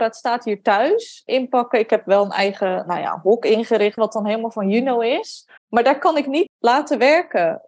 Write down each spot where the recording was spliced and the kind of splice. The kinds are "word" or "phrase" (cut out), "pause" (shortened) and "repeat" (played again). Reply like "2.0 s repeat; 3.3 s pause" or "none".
4.0 s word; 5.6 s pause; 6.5 s word